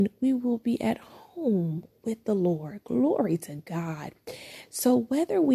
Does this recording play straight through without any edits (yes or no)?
yes